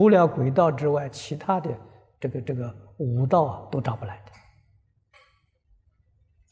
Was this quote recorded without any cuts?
yes; 0 cuts

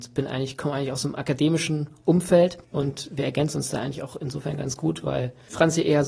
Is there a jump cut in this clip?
no; 0 cuts

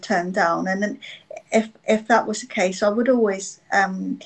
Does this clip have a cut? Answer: no; 0 cuts

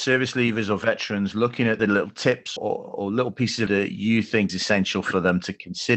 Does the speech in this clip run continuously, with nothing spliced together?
no; 4 cuts; at 1.8 s, 2.6 s, 3.7 s, 4.5 s

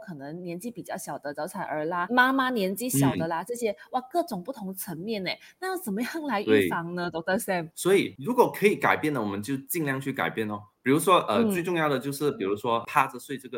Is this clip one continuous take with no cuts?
yes; 0 cuts

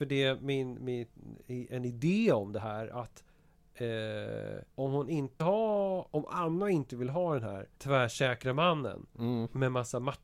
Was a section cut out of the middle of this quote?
yes; 3 cuts; at 4.7 s, 5.4 s, 7.7 s

